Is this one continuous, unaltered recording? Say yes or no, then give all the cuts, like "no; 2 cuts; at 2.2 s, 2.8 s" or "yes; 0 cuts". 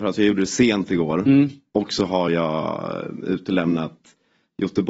yes; 0 cuts